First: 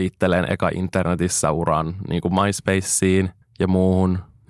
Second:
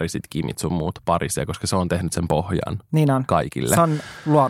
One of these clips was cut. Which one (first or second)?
first